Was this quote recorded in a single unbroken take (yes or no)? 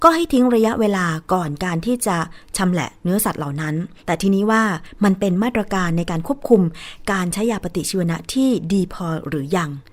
no